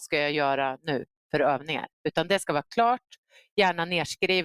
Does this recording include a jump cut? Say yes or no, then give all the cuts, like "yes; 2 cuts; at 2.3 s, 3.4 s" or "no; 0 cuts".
no; 0 cuts